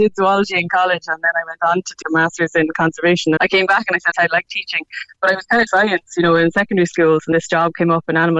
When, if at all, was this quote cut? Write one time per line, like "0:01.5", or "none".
0:02.0
0:03.4
0:04.1
0:05.7
0:07.3